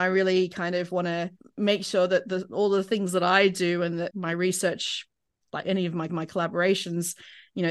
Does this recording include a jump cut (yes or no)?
yes